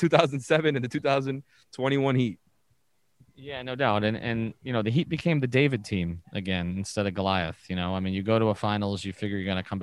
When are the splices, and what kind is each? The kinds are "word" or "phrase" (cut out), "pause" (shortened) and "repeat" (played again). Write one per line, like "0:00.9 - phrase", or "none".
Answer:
none